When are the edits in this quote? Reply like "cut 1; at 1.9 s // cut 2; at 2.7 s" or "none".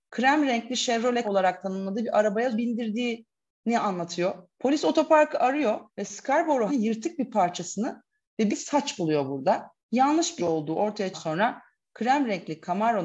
cut 1; at 1.2 s // cut 2; at 2.5 s // cut 3; at 4.5 s // cut 4; at 5.9 s // cut 5; at 6.7 s // cut 6; at 8.5 s // cut 7; at 9.8 s // cut 8; at 10.4 s // cut 9; at 11.1 s